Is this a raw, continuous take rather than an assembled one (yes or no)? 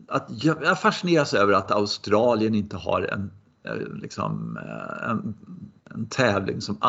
yes